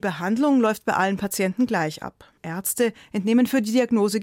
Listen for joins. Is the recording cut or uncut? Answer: cut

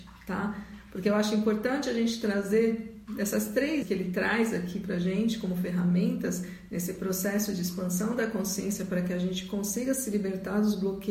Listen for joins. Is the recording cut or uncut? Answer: cut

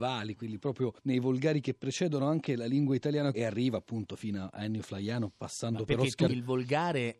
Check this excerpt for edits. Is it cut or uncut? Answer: cut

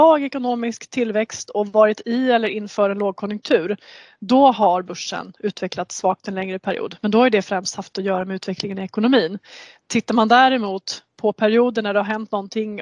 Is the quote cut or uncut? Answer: uncut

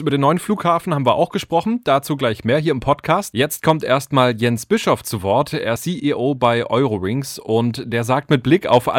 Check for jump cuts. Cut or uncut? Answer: cut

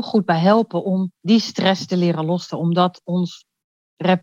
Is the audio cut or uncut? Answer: cut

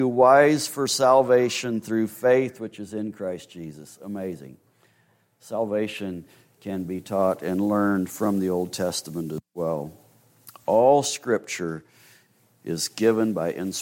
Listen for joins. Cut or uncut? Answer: uncut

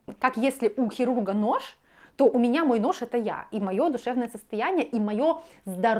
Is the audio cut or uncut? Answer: uncut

